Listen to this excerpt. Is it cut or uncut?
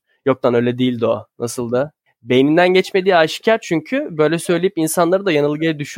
uncut